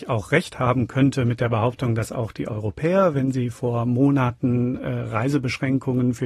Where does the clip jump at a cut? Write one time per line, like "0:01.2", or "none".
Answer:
none